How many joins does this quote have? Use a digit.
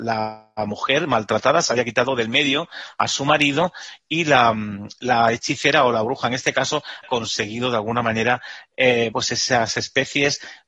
2